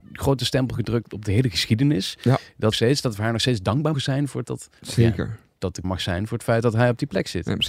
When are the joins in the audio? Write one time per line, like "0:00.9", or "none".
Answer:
0:01.1
0:02.7
0:03.9
0:04.4
0:04.8
0:05.8